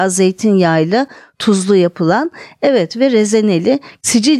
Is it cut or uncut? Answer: uncut